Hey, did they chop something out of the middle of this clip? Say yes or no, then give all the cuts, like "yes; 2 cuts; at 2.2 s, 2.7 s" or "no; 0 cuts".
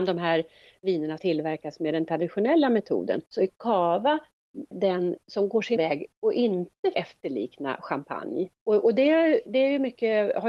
yes; 6 cuts; at 1.2 s, 3.3 s, 4.7 s, 5.8 s, 6.9 s, 8.6 s